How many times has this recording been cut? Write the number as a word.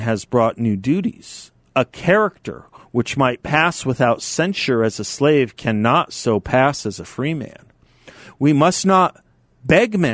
zero